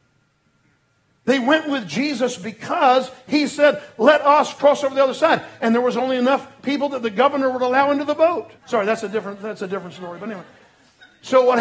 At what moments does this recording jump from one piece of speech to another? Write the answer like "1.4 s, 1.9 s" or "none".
8.6 s